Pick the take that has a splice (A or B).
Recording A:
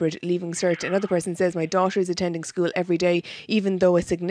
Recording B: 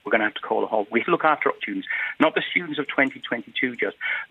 B